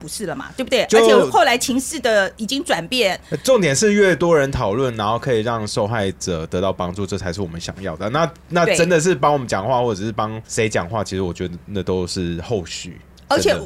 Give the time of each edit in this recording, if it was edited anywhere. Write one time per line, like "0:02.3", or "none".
0:10.5